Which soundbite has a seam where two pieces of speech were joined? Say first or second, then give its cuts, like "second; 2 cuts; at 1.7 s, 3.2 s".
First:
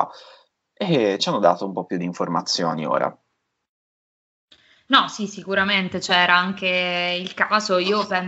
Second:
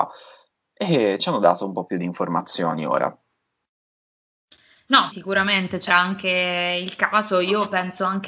second; 2 cuts; at 5.1 s, 5.9 s